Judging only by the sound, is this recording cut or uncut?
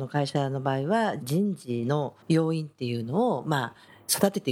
cut